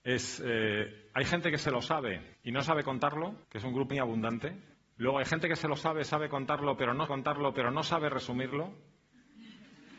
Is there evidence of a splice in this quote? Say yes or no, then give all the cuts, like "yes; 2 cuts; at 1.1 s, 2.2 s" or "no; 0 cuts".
yes; 5 cuts; at 2.3 s, 3.4 s, 3.9 s, 4.7 s, 7.1 s